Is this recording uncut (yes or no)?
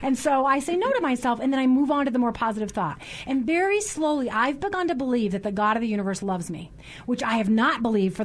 yes